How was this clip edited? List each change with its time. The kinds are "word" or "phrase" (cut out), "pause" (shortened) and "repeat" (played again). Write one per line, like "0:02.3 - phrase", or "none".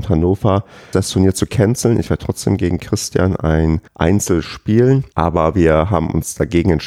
0:00.9 - word
0:03.9 - pause
0:05.1 - pause